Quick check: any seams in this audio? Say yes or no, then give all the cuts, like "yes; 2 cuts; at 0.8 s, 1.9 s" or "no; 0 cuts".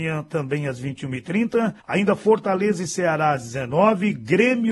yes; 1 cut; at 1.8 s